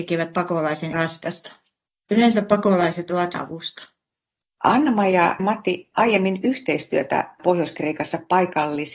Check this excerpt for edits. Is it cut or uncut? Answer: cut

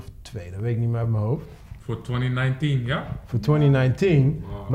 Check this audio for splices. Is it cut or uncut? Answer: uncut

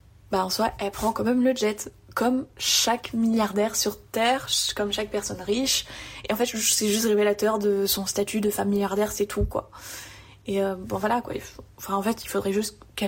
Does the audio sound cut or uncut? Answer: uncut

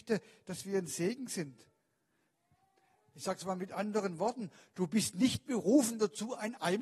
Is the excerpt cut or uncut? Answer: uncut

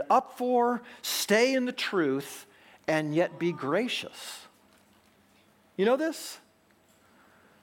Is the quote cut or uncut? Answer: uncut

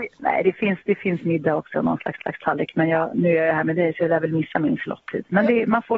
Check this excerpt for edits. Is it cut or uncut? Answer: cut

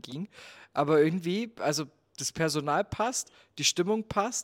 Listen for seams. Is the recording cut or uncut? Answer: uncut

